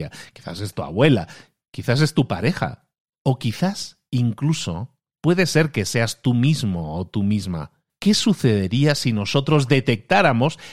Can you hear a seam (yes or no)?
no